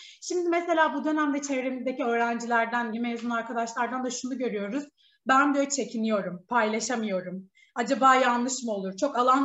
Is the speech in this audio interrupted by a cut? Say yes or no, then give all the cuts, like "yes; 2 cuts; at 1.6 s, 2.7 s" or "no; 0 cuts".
yes; 1 cut; at 2.9 s